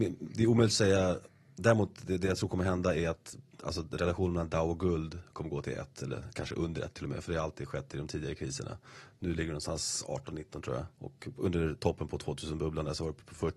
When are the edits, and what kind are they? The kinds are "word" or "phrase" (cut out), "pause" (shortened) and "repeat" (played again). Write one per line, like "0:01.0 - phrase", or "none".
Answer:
0:10.9 - pause